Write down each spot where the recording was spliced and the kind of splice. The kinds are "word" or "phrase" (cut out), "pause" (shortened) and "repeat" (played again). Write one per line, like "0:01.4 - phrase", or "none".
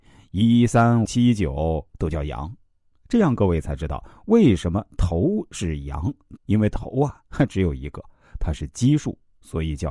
0:01.1 - word
0:06.4 - phrase